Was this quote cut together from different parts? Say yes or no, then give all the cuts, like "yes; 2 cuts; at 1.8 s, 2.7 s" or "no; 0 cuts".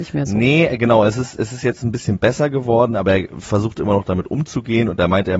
no; 0 cuts